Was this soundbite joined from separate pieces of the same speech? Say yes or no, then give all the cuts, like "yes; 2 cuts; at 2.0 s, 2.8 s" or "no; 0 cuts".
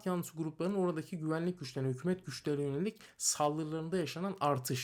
no; 0 cuts